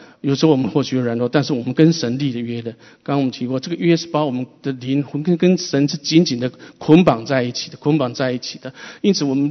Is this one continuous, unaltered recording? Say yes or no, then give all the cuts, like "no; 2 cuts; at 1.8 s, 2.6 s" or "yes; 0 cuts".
yes; 0 cuts